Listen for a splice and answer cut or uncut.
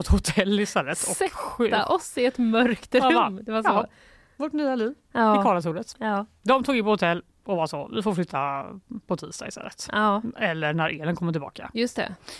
uncut